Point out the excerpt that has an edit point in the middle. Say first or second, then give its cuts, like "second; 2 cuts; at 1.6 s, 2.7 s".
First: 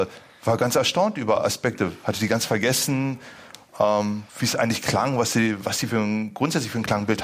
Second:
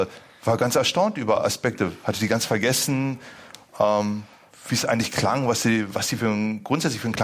first; 1 cut; at 4.3 s